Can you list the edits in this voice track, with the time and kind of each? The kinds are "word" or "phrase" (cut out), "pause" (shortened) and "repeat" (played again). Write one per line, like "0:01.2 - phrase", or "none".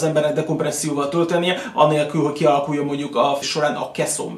0:03.4 - word